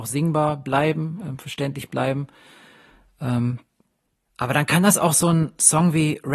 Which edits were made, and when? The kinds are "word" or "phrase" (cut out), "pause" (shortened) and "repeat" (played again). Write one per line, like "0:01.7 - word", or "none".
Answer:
0:03.9 - pause